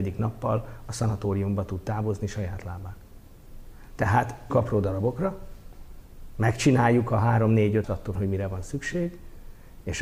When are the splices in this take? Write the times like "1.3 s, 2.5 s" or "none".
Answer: 4.5 s, 7.8 s, 8.1 s